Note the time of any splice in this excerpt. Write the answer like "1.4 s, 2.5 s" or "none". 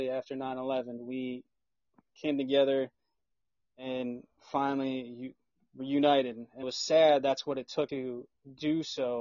6.6 s, 7.9 s